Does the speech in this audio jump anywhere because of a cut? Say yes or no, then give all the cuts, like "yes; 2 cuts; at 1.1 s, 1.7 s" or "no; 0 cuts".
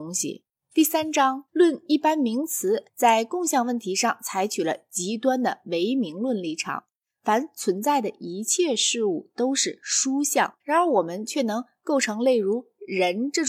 yes; 3 cuts; at 1.5 s, 2.9 s, 10.6 s